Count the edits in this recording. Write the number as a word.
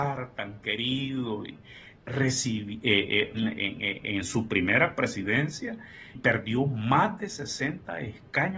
three